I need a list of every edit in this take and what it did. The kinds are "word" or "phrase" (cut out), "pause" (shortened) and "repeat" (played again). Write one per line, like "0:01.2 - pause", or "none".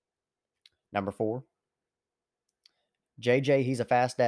none